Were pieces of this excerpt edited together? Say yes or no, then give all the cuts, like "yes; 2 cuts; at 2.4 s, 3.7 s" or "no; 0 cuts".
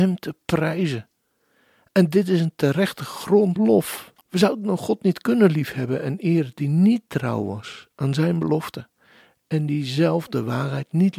yes; 2 cuts; at 3.6 s, 4.2 s